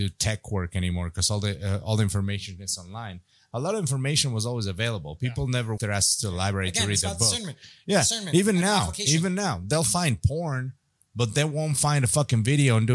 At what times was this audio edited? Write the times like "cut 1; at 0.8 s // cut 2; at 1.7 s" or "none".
cut 1; at 5.8 s